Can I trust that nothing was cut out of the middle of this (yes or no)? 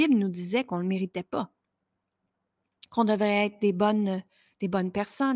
yes